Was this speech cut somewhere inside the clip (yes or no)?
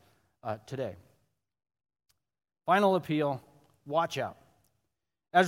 no